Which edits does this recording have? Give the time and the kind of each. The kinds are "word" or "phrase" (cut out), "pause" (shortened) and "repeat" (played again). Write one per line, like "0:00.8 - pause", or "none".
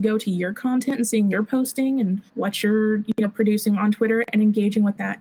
0:01.3 - word
0:02.3 - pause